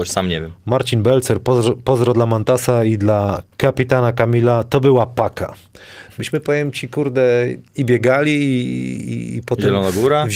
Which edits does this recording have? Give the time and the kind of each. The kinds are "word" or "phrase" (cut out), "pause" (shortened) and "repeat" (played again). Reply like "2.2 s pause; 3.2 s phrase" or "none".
3.5 s pause; 7.7 s pause